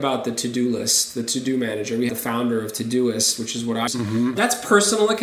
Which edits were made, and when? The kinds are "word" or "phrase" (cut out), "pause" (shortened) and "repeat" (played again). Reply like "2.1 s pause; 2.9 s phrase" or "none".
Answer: 2.1 s word; 3.9 s word